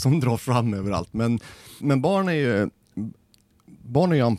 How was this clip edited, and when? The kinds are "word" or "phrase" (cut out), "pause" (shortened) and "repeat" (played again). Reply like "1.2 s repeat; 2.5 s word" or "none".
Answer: 1.8 s word

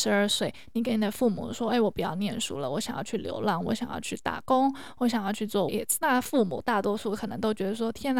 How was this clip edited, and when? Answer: 5.7 s word; 6.0 s phrase

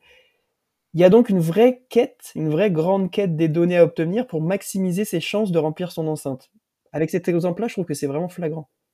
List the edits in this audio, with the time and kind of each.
none

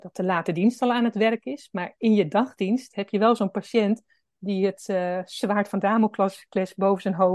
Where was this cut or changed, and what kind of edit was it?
none

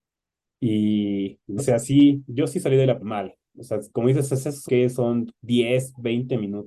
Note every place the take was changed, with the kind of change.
1.6 s word; 3.0 s word; 3.9 s pause; 4.7 s word; 5.3 s pause

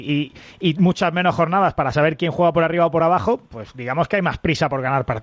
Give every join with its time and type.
none

